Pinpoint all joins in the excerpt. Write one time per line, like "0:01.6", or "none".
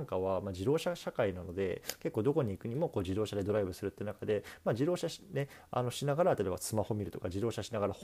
none